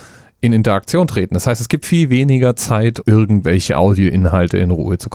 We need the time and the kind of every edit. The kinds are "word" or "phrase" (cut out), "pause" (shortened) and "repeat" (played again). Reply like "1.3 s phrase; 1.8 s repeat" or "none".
1.8 s word; 3.0 s word